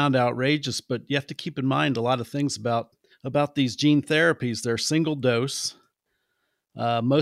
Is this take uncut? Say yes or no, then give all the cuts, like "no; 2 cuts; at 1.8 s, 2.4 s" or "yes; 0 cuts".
no; 1 cut; at 3.1 s